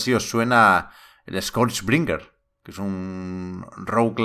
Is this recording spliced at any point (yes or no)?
no